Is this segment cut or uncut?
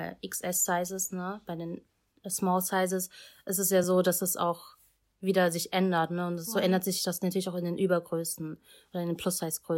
uncut